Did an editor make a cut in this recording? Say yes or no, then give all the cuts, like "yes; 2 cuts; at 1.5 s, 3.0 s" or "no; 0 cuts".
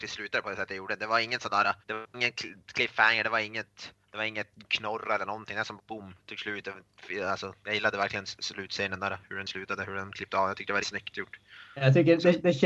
yes; 4 cuts; at 1.8 s, 4.0 s, 5.8 s, 10.8 s